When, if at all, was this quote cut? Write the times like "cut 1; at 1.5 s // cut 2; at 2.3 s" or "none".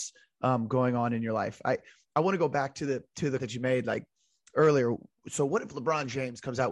cut 1; at 3.4 s